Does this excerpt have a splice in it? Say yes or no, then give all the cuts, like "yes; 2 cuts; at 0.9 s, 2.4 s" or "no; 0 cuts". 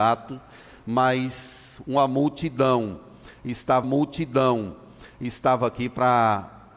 yes; 1 cut; at 3.8 s